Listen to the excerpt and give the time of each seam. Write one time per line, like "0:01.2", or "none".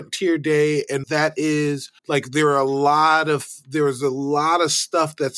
0:01.0
0:02.0